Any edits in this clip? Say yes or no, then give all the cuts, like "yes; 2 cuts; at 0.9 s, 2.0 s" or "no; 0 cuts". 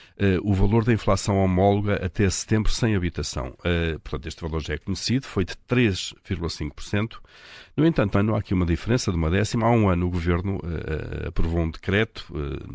yes; 1 cut; at 8.1 s